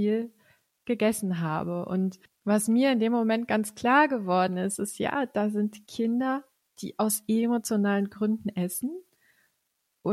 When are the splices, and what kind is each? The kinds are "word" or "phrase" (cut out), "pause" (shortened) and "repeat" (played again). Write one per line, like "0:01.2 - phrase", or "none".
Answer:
none